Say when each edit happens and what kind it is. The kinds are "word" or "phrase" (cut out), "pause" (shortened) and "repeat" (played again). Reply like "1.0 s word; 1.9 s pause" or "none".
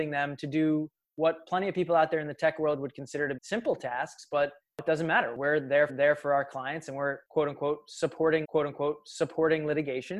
3.4 s word; 5.9 s repeat; 8.4 s repeat